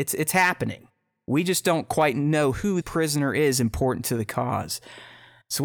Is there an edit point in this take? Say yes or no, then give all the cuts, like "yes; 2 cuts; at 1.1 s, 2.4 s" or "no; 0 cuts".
yes; 1 cut; at 2.8 s